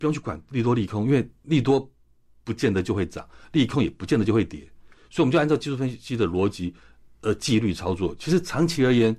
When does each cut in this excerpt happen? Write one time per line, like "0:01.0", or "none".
none

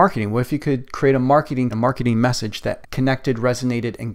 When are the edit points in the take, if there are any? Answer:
0:01.7
0:02.8

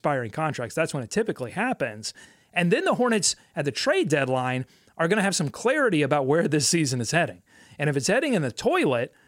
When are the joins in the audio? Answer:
none

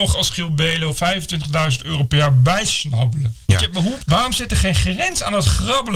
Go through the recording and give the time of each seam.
0:00.9
0:04.0

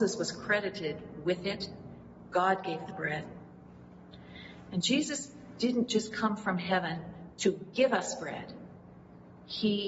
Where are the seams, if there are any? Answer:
none

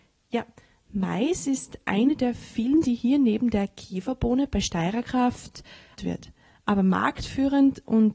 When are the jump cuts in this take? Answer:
0:02.8
0:06.0

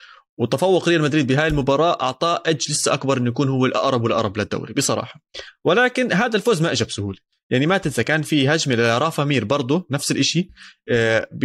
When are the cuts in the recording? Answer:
none

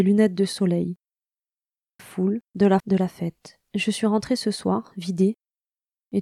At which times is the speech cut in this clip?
0:02.0
0:02.5
0:02.8
0:03.6

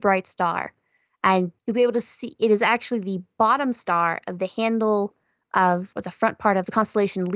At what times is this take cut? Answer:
0:01.6
0:05.9

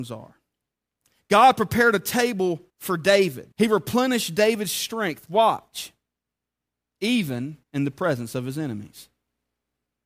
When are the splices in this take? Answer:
0:02.7
0:03.5
0:07.6

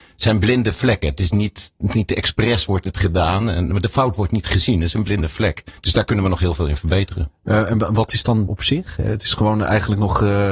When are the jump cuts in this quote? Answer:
0:05.8
0:08.5

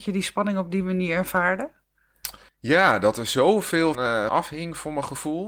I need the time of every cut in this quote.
0:02.5
0:03.9
0:04.3

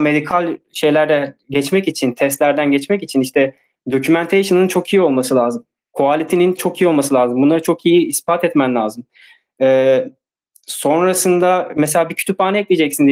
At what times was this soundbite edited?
none

